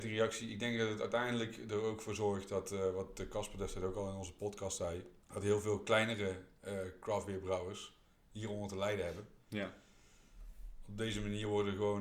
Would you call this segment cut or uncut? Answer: cut